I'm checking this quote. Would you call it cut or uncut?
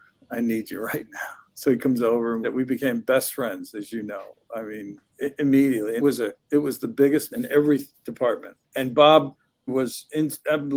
cut